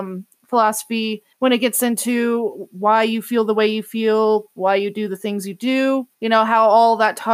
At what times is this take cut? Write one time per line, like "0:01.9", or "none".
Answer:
0:01.3
0:06.1